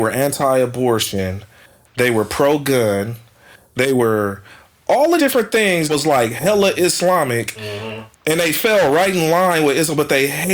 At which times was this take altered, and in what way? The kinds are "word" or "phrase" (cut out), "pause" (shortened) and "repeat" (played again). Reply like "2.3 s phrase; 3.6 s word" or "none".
5.2 s word; 5.9 s word